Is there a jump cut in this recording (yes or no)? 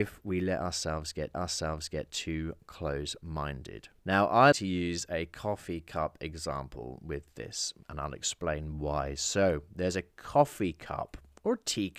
yes